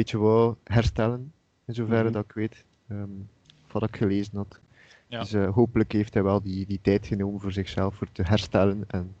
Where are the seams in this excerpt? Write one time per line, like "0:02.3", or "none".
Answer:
0:03.4